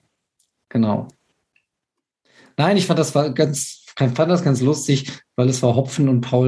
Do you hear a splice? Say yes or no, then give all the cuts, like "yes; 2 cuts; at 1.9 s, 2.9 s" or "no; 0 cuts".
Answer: no; 0 cuts